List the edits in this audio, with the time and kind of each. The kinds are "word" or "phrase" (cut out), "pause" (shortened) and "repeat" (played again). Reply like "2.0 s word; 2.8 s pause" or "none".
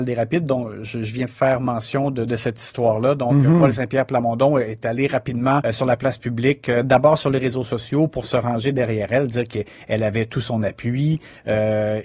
5.6 s word